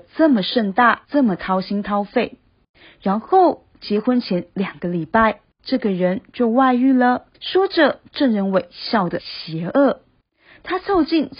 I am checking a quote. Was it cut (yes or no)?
yes